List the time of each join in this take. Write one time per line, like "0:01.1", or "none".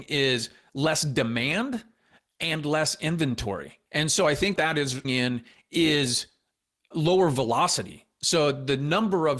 0:03.9
0:04.5
0:05.0
0:06.9